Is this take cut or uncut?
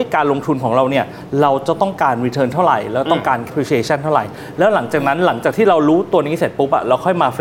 cut